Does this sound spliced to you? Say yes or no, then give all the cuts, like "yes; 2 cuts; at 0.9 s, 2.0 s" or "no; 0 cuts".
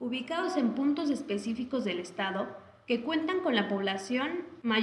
no; 0 cuts